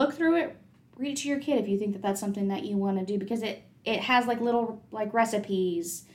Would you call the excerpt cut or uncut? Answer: uncut